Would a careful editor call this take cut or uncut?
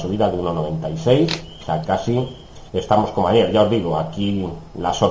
cut